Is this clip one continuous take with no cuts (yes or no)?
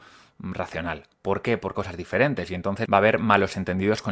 no